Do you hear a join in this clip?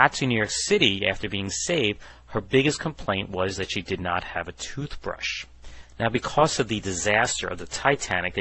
no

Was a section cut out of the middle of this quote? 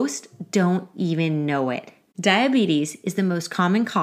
no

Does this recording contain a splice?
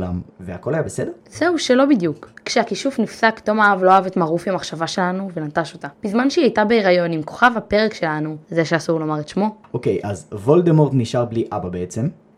yes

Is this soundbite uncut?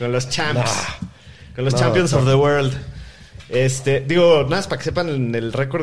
yes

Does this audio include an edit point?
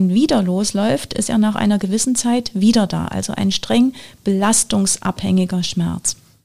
no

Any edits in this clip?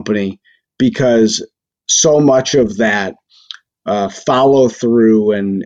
no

